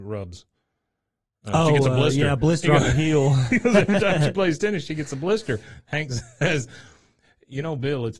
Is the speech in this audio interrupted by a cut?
no; 0 cuts

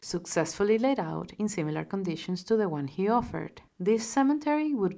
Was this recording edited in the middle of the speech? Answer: no; 0 cuts

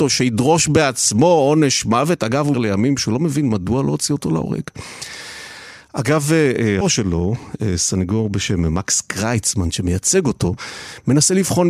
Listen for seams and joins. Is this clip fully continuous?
no; 2 cuts; at 2.5 s, 6.8 s

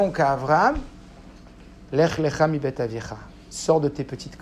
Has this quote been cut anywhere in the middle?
yes; 1 cut; at 1.9 s

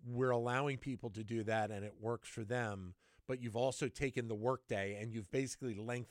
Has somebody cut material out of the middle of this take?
no; 0 cuts

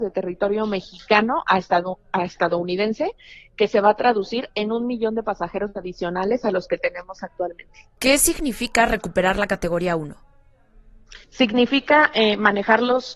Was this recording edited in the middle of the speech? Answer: yes; 2 cuts; at 8.0 s, 11.2 s

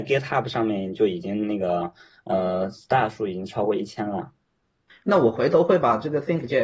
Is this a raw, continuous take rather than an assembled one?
yes; 0 cuts

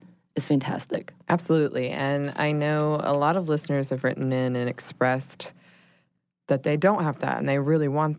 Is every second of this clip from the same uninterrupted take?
no; 1 cut; at 1.2 s

